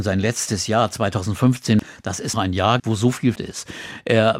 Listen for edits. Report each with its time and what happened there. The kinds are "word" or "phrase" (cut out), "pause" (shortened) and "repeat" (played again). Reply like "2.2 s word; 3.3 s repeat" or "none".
2.3 s word; 2.8 s word; 3.4 s word